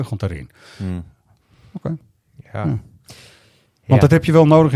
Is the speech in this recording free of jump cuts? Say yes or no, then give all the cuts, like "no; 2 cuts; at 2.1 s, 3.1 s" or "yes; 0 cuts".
yes; 0 cuts